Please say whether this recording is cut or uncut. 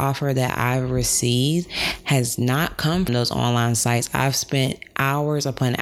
cut